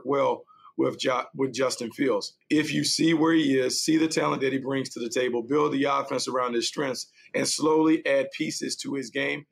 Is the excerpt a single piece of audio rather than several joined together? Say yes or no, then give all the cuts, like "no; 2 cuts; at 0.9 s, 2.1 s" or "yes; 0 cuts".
no; 1 cut; at 2.4 s